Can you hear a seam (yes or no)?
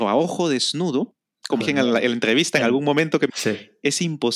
yes